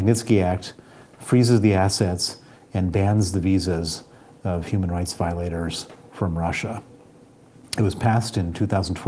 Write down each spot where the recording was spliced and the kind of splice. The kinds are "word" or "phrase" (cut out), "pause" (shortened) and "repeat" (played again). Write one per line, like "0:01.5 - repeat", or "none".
none